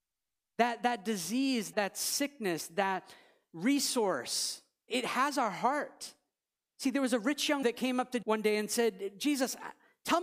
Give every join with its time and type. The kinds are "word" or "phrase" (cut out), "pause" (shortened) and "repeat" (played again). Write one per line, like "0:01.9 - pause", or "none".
0:01.7 - word
0:04.9 - word
0:07.6 - word
0:08.2 - word